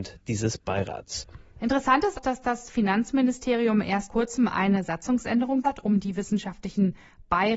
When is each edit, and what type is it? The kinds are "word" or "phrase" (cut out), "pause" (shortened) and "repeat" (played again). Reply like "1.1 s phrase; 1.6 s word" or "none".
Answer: 2.1 s word; 4.1 s word; 5.6 s word